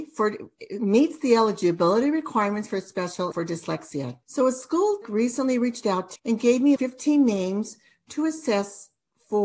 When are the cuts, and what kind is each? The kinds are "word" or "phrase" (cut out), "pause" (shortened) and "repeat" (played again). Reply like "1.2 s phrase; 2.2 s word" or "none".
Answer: 3.3 s word; 4.2 s pause; 5.0 s word; 6.2 s word; 6.8 s word